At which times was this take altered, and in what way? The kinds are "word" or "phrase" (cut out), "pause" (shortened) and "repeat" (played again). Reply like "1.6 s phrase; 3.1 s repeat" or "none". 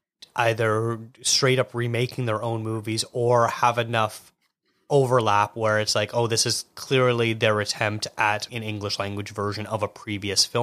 8.5 s word

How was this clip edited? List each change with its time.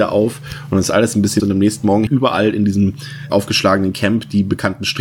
1.4 s word; 2.1 s word; 3.3 s word

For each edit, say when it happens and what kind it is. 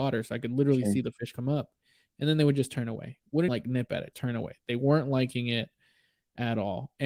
3.5 s word; 4.1 s word

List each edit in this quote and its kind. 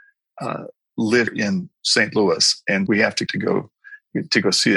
1.3 s word; 1.7 s pause; 2.9 s word; 3.3 s word

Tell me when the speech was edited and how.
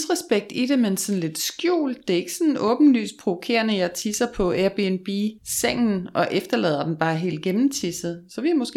5.4 s pause

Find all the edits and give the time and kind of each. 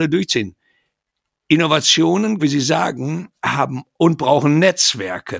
2.4 s word; 4.0 s word

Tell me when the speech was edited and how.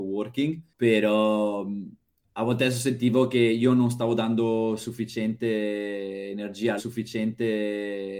6.8 s repeat

